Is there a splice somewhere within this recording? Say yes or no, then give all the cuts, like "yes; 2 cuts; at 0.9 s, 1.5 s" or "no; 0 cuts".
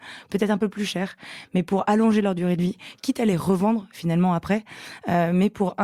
no; 0 cuts